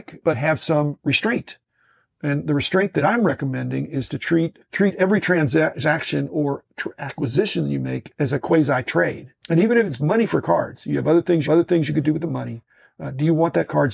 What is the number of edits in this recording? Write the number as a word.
two